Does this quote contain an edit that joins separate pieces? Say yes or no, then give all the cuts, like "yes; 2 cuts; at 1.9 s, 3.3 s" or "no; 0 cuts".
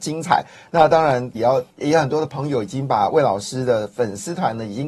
yes; 2 cuts; at 1.4 s, 1.7 s